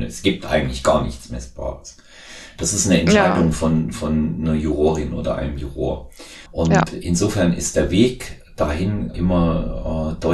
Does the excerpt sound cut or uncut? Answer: cut